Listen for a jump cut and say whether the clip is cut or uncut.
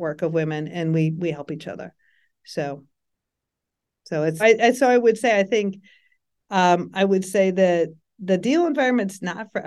cut